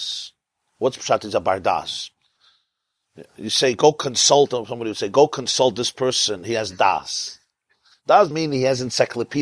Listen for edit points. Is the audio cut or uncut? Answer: cut